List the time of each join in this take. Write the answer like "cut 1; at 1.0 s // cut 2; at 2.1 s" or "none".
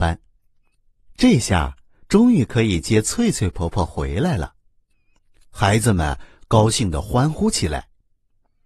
none

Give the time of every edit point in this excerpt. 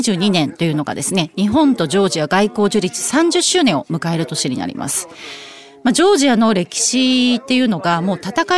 none

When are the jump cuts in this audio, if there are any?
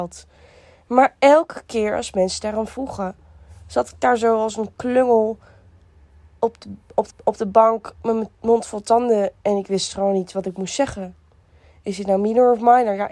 cut 1; at 7.1 s

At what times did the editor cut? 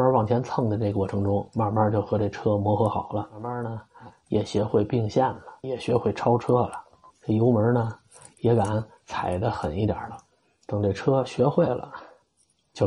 cut 1; at 5.6 s // cut 2; at 7.1 s

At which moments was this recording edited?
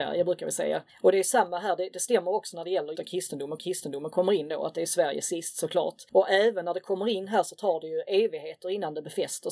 cut 1; at 2.9 s // cut 2; at 3.6 s

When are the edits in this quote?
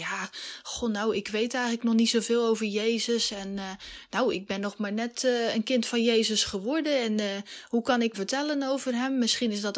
cut 1; at 8.1 s

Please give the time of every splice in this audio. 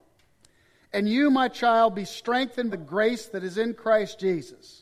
cut 1; at 2.7 s

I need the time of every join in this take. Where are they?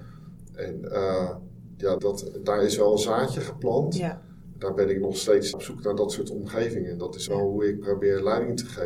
cut 1; at 2.0 s // cut 2; at 5.5 s // cut 3; at 7.3 s

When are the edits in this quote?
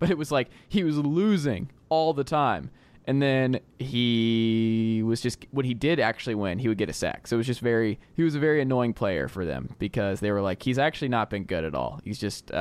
cut 1; at 8.0 s

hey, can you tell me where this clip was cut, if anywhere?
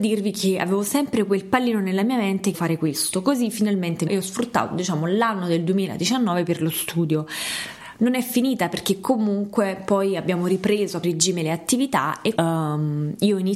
cut 1; at 2.5 s // cut 2; at 4.1 s // cut 3; at 11.0 s // cut 4; at 12.4 s

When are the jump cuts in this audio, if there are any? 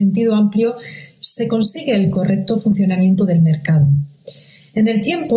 none

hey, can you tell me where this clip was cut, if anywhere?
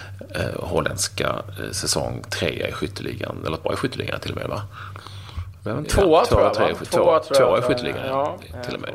cut 1; at 3.6 s // cut 2; at 5.8 s

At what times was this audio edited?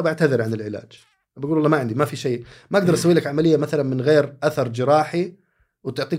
none

